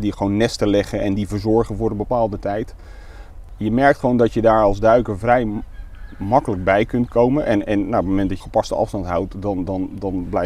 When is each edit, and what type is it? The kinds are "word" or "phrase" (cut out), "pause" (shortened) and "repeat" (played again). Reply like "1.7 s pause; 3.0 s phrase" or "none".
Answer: 8.4 s phrase